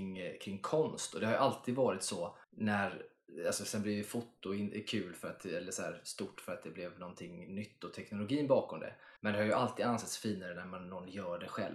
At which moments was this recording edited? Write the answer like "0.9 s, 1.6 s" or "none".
2.4 s, 9.2 s